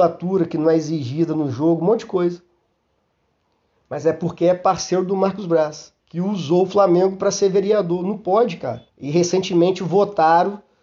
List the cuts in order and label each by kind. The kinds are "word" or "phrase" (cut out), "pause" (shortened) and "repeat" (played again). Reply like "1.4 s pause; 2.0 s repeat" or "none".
6.0 s pause; 8.9 s pause